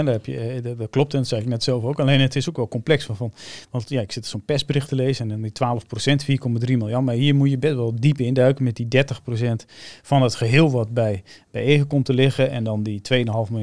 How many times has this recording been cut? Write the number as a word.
zero